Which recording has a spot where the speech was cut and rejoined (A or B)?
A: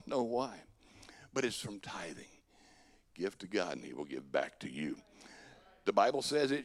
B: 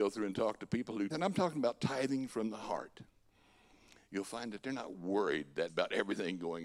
B